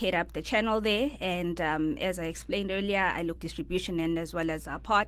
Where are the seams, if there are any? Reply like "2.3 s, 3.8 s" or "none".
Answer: 3.4 s